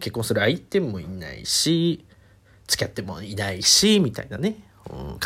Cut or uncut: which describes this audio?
uncut